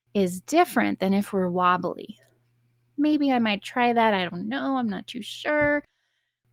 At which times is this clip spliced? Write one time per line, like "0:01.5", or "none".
none